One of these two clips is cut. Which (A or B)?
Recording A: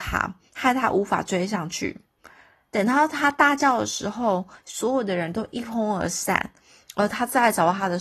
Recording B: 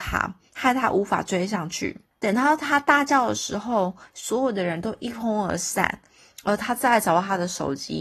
B